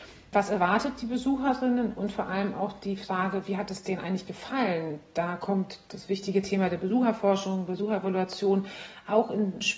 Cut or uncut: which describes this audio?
uncut